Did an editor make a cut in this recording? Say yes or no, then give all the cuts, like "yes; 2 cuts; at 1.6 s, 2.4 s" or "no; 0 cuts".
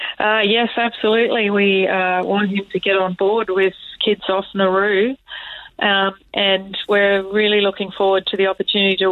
no; 0 cuts